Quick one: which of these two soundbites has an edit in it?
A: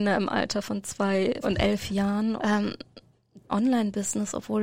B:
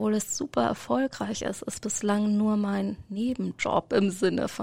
A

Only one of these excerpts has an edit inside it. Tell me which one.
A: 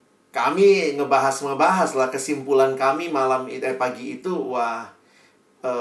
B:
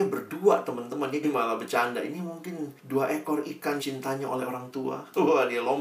B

